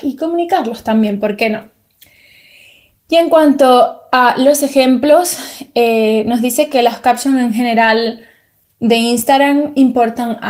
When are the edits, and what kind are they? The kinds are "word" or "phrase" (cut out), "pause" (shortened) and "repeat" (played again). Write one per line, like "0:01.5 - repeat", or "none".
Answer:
none